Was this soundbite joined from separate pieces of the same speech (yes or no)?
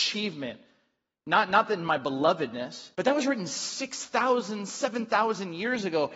yes